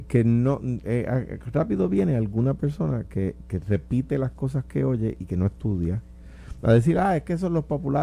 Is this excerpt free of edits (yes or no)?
yes